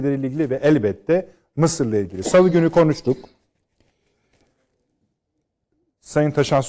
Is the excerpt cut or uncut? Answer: uncut